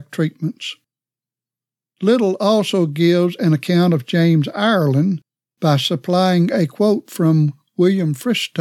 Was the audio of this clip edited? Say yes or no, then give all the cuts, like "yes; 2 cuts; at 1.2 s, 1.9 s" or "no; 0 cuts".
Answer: no; 0 cuts